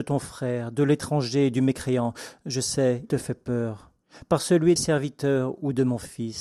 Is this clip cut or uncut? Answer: cut